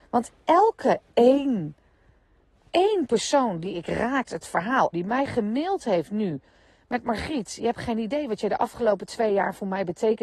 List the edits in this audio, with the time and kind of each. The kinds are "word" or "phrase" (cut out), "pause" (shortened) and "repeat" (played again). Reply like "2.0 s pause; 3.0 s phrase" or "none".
4.3 s word; 4.9 s phrase